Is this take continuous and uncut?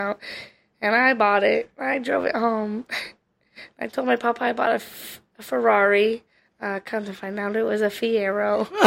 yes; 0 cuts

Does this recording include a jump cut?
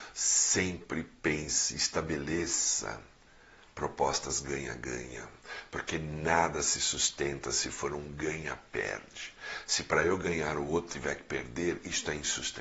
no; 0 cuts

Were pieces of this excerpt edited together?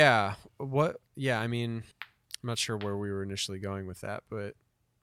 yes; 2 cuts; at 1.1 s, 1.9 s

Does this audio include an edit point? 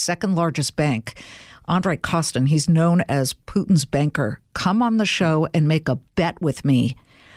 no; 0 cuts

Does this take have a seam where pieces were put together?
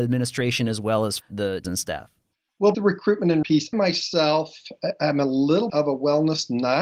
yes; 6 cuts; at 1.2 s, 1.6 s, 2.7 s, 3.4 s, 3.7 s, 5.7 s

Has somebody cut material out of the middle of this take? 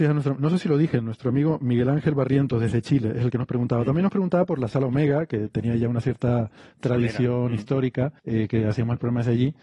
yes; 1 cut; at 8.2 s

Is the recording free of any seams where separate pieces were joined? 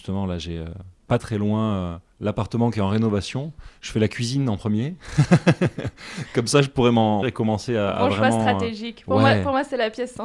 no; 2 cuts; at 1.2 s, 7.2 s

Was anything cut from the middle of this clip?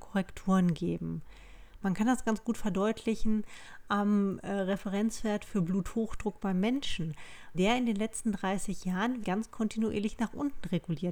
yes; 2 cuts; at 7.5 s, 9.2 s

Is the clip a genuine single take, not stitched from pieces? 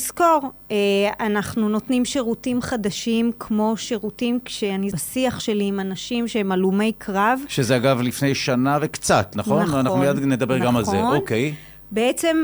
no; 1 cut; at 4.9 s

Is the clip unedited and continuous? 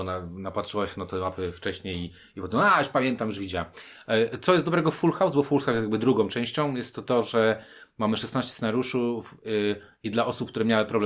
yes; 0 cuts

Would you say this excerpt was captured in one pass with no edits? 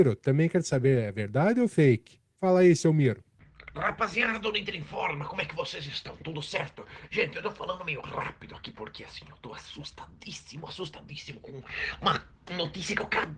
yes; 0 cuts

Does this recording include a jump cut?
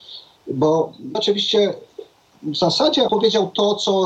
yes; 2 cuts; at 1.1 s, 3.1 s

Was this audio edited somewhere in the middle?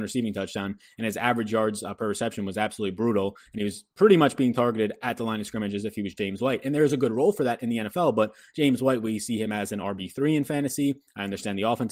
no; 0 cuts

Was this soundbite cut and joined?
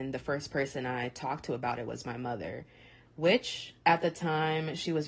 yes; 1 cut; at 3.8 s

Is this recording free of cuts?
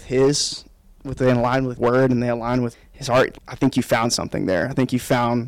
no; 3 cuts; at 1.8 s, 2.7 s, 3.4 s

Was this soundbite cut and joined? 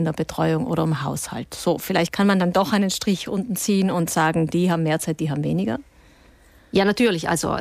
no; 0 cuts

